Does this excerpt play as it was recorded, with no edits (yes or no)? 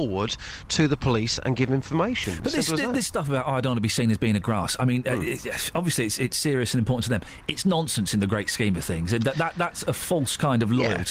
yes